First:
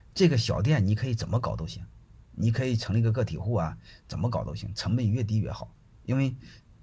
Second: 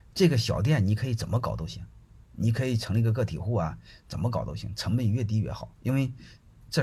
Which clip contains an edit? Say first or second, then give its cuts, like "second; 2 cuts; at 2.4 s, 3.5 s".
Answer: second; 1 cut; at 5.8 s